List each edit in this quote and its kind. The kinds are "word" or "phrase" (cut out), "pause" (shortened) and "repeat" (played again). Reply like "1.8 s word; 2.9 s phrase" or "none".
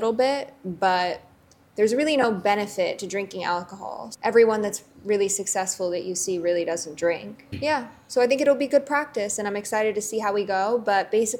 none